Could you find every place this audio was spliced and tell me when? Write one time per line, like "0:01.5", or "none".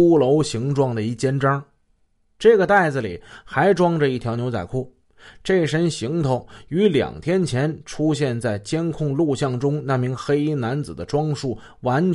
none